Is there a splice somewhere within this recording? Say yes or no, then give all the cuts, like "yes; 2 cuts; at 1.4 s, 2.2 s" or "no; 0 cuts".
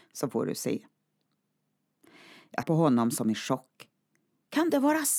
yes; 1 cut; at 2.6 s